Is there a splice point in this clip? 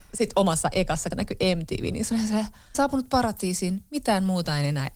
yes; 2 cuts; at 1.1 s, 2.7 s

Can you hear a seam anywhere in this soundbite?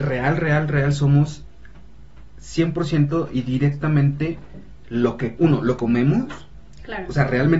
yes; 1 cut; at 5.8 s

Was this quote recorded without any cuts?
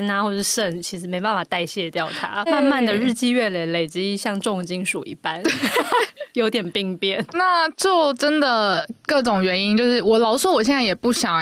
no; 2 cuts; at 2.5 s, 7.3 s

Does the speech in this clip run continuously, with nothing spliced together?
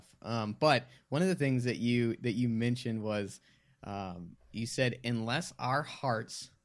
yes; 0 cuts

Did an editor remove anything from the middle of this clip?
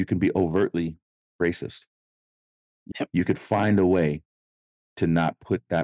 yes; 1 cut; at 2.9 s

